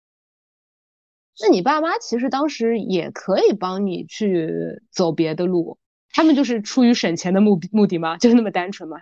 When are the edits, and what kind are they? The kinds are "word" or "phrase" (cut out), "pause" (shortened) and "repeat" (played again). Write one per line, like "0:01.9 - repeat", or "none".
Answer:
0:05.8 - pause